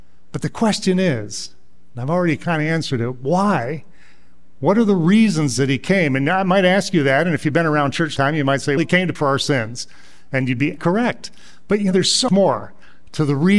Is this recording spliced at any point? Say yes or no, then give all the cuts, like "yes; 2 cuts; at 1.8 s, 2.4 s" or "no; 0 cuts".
yes; 6 cuts; at 8.2 s, 8.8 s, 9.2 s, 10.8 s, 11.9 s, 12.3 s